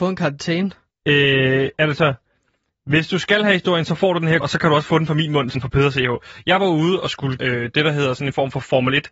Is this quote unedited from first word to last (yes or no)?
no